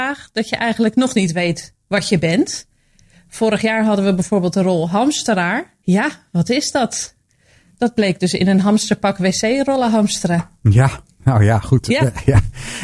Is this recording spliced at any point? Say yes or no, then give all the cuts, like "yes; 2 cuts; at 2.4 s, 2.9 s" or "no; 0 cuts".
no; 0 cuts